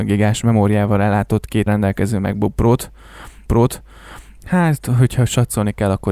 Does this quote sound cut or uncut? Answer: cut